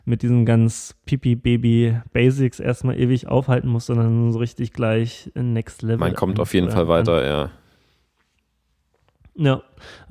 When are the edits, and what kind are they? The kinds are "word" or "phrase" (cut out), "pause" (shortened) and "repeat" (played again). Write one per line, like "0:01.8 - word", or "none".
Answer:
none